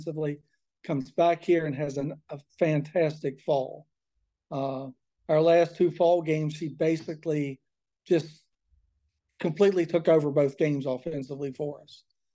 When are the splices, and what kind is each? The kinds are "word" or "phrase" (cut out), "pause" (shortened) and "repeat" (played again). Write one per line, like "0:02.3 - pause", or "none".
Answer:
none